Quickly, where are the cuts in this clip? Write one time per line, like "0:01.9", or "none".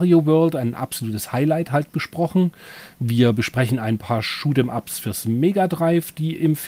none